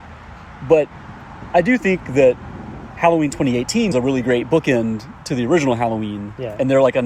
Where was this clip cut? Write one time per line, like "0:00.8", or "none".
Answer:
0:03.9

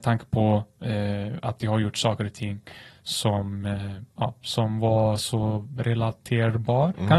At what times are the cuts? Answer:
none

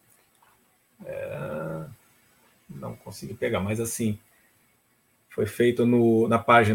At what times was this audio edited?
none

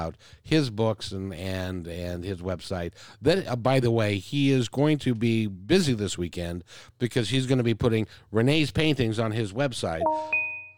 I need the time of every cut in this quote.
none

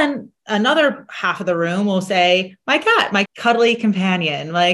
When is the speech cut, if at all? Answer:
0:03.3

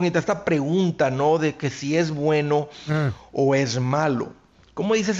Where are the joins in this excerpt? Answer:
none

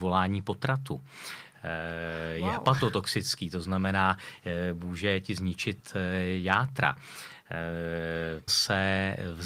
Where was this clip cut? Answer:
0:08.5

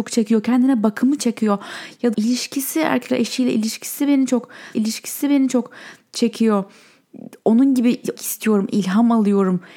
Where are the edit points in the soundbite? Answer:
0:01.2
0:02.1
0:03.1
0:04.7
0:08.2

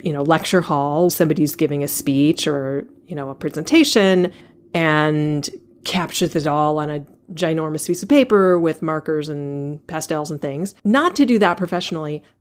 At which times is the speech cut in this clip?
0:01.1
0:04.4
0:10.8

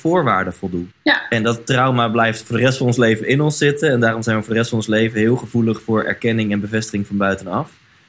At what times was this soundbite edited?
0:00.9

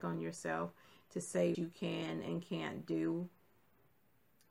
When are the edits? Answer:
0:01.5

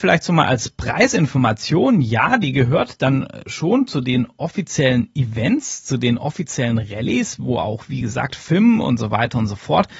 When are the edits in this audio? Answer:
none

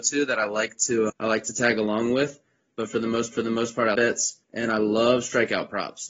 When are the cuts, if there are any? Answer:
0:01.1
0:03.3
0:03.9
0:04.4

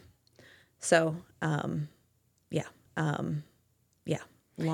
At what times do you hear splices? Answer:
0:02.9

